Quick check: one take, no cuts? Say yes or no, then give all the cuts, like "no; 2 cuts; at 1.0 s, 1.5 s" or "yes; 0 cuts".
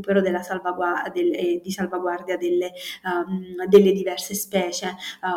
yes; 0 cuts